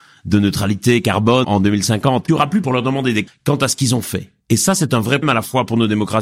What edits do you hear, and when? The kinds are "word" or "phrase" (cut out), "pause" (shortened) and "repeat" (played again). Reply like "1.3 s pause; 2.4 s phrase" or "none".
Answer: 1.4 s word; 2.3 s phrase; 2.6 s word; 3.3 s word; 4.4 s pause; 5.2 s word